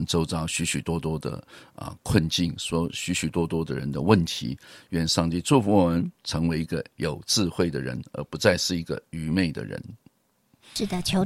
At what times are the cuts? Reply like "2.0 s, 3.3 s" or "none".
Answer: 6.2 s

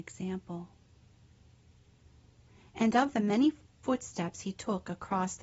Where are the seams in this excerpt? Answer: none

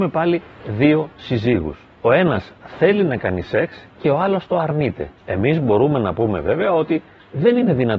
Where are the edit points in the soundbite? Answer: 1.9 s, 5.2 s

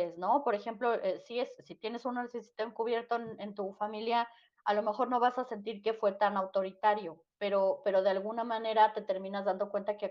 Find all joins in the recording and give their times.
none

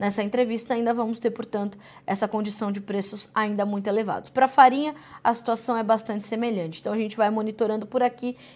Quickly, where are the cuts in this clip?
none

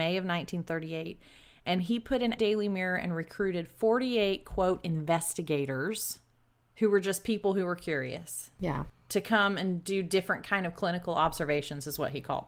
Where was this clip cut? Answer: 2.4 s

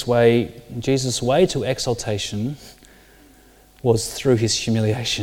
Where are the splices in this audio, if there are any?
none

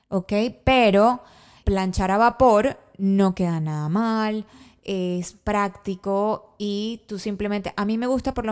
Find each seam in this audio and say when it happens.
1.6 s

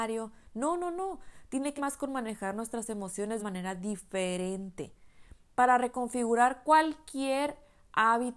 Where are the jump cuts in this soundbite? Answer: 1.8 s, 3.4 s

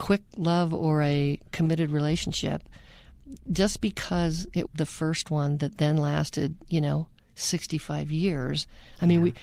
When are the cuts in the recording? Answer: 4.7 s

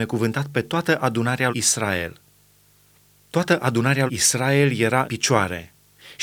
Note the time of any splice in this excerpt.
1.5 s, 4.1 s, 5.0 s

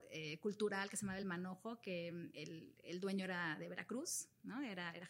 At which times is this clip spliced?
none

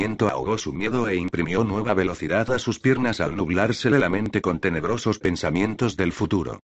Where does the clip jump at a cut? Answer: none

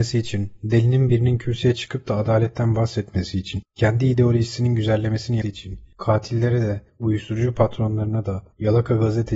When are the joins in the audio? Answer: 5.4 s

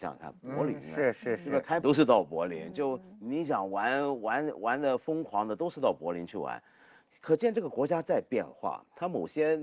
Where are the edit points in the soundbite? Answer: 1.8 s

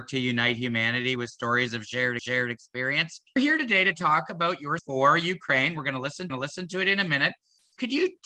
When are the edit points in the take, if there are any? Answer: 2.2 s, 4.8 s, 6.3 s

